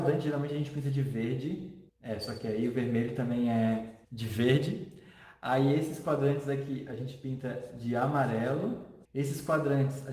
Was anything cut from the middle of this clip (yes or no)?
yes